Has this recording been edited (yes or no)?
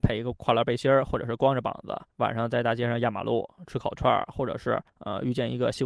yes